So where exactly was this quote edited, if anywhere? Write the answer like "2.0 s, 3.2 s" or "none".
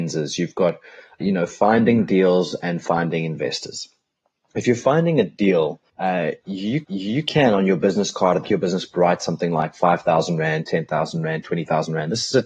1.2 s, 5.9 s, 6.8 s, 8.4 s, 8.9 s

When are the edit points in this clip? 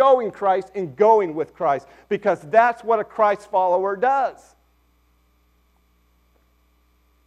none

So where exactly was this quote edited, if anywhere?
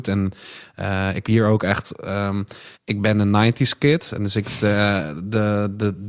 1.2 s, 2.7 s

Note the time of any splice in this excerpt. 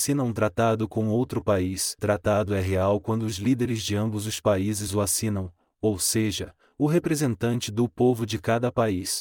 2.0 s

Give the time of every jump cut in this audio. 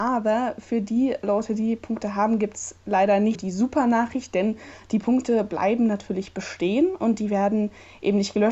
3.3 s

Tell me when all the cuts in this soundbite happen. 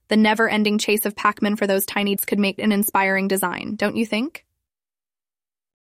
2.2 s, 2.6 s

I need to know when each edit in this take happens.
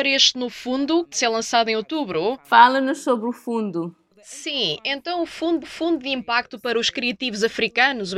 1.1 s, 5.6 s

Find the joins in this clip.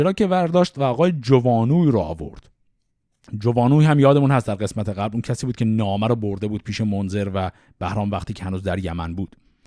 none

